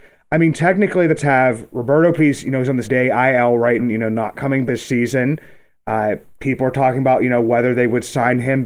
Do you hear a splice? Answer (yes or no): yes